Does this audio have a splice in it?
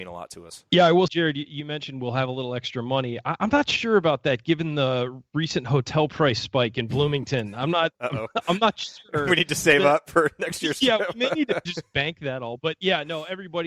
yes; 2 cuts; at 1.1 s, 11.7 s

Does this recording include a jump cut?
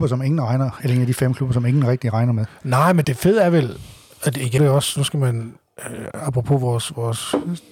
yes; 4 cuts; at 3.0 s, 4.1 s, 4.6 s, 5.7 s

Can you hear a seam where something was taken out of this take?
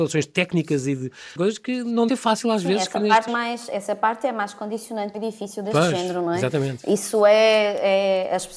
yes; 4 cuts; at 1.4 s, 2.1 s, 3.3 s, 5.1 s

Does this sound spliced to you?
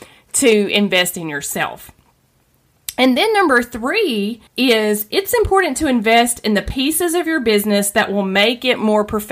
yes; 1 cut; at 4.5 s

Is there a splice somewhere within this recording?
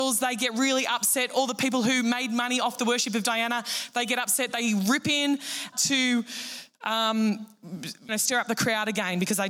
yes; 2 cuts; at 5.7 s, 8.1 s

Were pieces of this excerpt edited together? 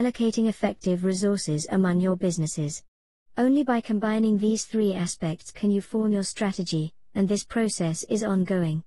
no; 0 cuts

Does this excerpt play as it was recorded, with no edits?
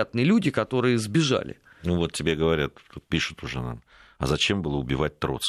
yes; 0 cuts

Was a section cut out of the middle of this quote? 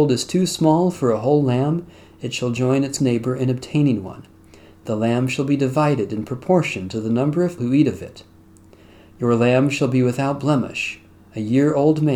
yes; 2 cuts; at 3.0 s, 7.6 s

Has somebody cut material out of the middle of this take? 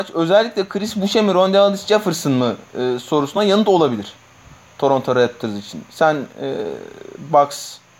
no; 0 cuts

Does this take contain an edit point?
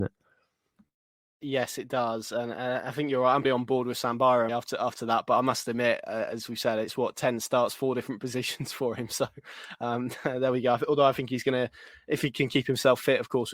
yes; 2 cuts; at 3.4 s, 4.5 s

